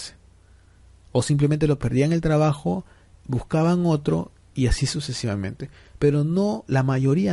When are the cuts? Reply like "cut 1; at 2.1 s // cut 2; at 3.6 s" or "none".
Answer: cut 1; at 1.8 s